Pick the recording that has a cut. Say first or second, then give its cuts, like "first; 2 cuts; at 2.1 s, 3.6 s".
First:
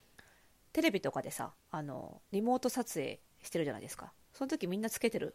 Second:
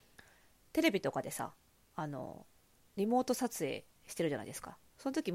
first; 2 cuts; at 1.6 s, 2.3 s